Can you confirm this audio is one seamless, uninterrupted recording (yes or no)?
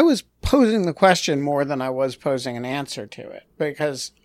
yes